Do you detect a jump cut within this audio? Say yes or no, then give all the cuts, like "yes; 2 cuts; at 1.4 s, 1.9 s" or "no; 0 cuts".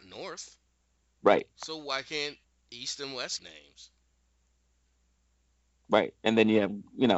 yes; 3 cuts; at 1.0 s, 2.4 s, 3.4 s